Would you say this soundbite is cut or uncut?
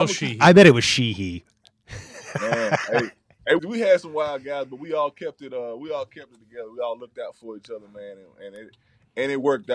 cut